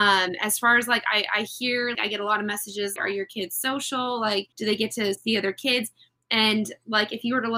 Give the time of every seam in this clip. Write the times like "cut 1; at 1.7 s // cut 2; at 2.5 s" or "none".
cut 1; at 1.9 s // cut 2; at 3.0 s // cut 3; at 4.5 s